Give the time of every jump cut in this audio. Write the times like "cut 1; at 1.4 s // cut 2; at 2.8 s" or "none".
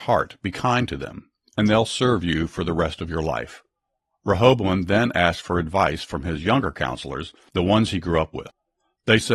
none